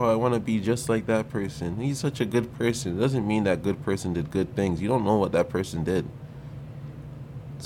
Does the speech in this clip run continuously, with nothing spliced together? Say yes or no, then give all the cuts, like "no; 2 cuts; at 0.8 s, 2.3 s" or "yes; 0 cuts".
yes; 0 cuts